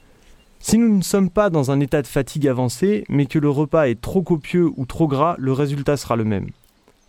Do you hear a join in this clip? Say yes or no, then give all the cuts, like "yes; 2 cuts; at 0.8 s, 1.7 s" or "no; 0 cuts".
no; 0 cuts